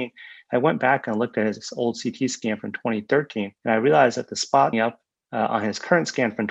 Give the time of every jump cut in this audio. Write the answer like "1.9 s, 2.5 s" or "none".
3.6 s, 4.7 s, 5.3 s